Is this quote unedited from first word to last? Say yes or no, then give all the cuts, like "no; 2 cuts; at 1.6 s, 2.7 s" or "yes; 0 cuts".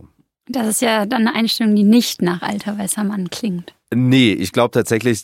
no; 1 cut; at 3.8 s